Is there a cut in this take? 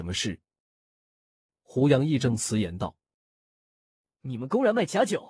no; 0 cuts

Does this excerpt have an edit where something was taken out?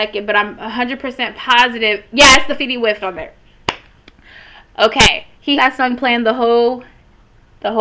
yes; 3 cuts; at 2.6 s, 3.0 s, 5.6 s

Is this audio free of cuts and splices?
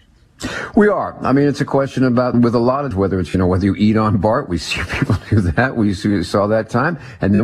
no; 2 cuts; at 2.3 s, 2.9 s

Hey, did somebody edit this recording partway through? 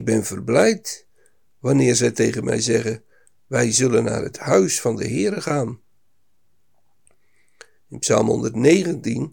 no; 0 cuts

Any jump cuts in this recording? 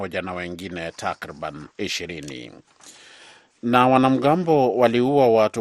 yes; 1 cut; at 1.7 s

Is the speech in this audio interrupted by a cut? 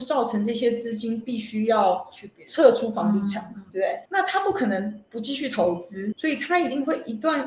yes; 3 cuts; at 3.7 s, 4.1 s, 6.1 s

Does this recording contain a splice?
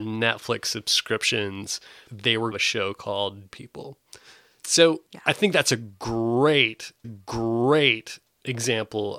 yes; 5 cuts; at 2.1 s, 2.5 s, 3.5 s, 5.1 s, 7.0 s

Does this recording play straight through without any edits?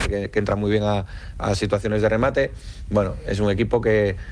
yes; 0 cuts

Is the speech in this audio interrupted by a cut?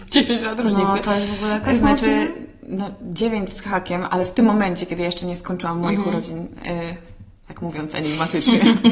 no; 0 cuts

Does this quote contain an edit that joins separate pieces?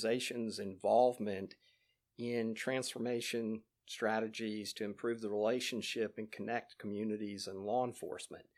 no; 0 cuts

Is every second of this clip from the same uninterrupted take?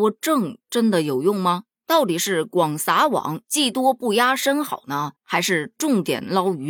no; 2 cuts; at 1.7 s, 5.2 s

